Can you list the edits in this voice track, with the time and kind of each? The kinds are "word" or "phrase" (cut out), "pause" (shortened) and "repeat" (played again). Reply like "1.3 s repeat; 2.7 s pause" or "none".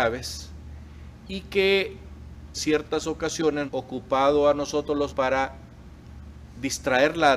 2.5 s word; 3.7 s phrase; 5.1 s word